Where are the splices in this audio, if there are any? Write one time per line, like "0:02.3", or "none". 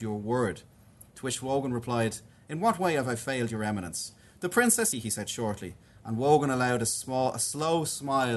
0:04.9

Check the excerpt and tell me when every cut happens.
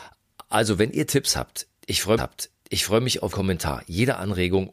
0:02.2
0:03.3

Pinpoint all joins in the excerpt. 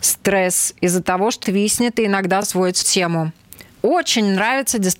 0:01.4
0:02.4
0:02.8
0:03.7

